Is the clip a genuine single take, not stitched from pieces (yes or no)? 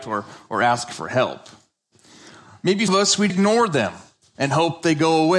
no